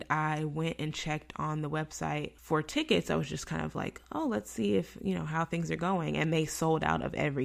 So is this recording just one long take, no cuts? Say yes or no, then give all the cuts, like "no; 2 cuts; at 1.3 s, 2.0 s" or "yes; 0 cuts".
no; 1 cut; at 2.4 s